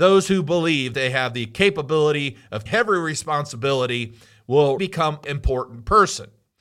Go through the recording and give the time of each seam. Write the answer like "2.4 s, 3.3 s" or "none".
0.9 s, 2.7 s, 4.8 s, 5.2 s

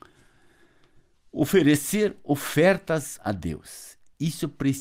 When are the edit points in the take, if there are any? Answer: 3.2 s

